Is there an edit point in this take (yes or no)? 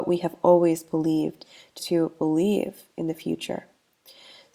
yes